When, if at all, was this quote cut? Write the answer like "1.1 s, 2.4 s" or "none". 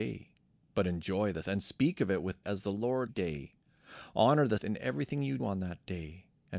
1.4 s, 2.4 s, 3.1 s, 4.6 s, 5.4 s